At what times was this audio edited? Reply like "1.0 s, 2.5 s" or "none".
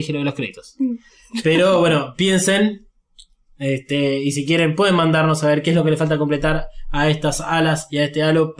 none